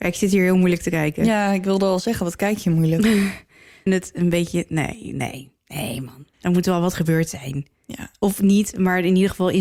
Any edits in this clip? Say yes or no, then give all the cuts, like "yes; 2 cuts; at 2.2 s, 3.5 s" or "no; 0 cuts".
yes; 3 cuts; at 3.9 s, 6.3 s, 7.8 s